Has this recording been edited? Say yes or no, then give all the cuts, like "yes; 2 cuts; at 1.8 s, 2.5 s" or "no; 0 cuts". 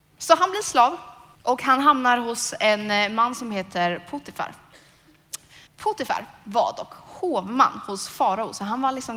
yes; 2 cuts; at 1.3 s, 5.7 s